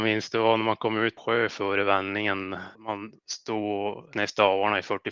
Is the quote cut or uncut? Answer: cut